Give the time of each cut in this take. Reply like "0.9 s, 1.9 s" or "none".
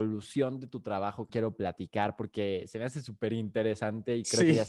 1.3 s